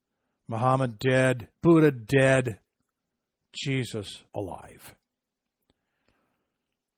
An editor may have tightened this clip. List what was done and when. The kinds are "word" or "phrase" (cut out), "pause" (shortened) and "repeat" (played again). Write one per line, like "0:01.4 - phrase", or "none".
0:01.5 - pause
0:04.3 - pause